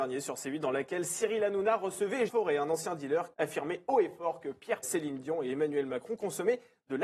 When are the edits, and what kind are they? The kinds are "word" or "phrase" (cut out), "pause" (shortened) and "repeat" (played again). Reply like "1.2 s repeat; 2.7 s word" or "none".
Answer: 2.3 s word; 3.3 s word; 4.8 s word